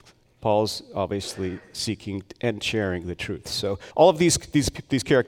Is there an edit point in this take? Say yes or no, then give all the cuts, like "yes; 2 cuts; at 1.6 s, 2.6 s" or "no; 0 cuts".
yes; 1 cut; at 3.9 s